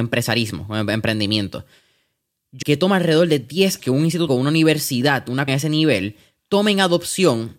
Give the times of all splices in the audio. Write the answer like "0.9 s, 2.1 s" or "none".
2.6 s, 3.8 s, 4.3 s, 5.5 s